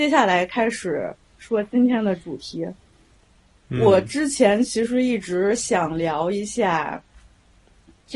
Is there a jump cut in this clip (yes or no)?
no